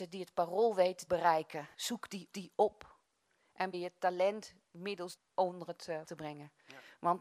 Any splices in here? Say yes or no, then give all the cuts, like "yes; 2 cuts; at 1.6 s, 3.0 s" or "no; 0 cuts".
yes; 6 cuts; at 1.1 s, 1.7 s, 2.3 s, 3.7 s, 5.2 s, 6.0 s